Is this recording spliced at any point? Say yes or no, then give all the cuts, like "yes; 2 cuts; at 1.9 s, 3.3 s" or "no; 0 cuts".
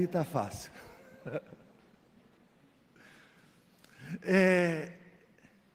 no; 0 cuts